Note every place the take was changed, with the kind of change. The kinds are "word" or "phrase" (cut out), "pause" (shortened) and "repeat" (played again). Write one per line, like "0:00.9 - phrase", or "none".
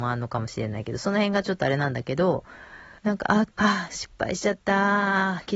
0:03.0 - pause
0:03.5 - pause